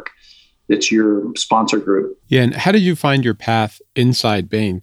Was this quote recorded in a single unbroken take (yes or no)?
no